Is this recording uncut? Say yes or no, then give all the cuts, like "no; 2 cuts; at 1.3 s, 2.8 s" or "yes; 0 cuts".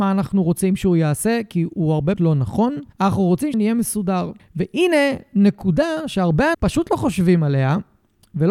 no; 5 cuts; at 2.2 s, 2.9 s, 3.5 s, 4.4 s, 6.5 s